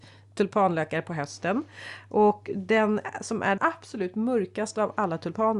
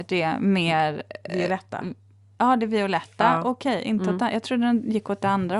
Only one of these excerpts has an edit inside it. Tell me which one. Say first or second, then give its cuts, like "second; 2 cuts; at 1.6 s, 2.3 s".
first; 1 cut; at 3.6 s